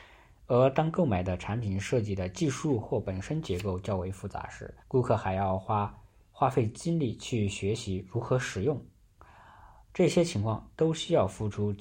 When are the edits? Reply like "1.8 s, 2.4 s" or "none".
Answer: 4.8 s